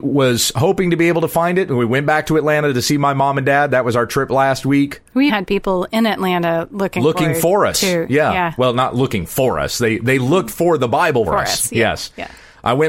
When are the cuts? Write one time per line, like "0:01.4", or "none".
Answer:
0:05.3
0:11.3